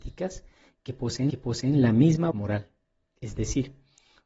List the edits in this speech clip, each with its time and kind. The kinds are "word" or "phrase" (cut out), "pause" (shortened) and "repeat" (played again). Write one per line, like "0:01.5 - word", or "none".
0:01.3 - repeat
0:02.3 - word